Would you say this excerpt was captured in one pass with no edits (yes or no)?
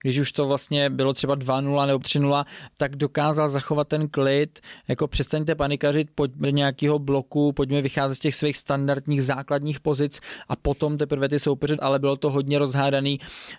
no